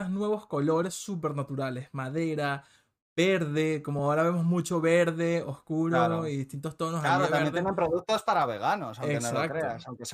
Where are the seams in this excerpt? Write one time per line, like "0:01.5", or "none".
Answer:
none